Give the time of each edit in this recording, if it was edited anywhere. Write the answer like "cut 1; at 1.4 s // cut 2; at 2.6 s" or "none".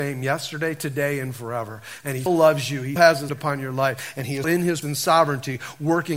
cut 1; at 2.3 s // cut 2; at 3.0 s // cut 3; at 3.3 s // cut 4; at 4.4 s // cut 5; at 4.8 s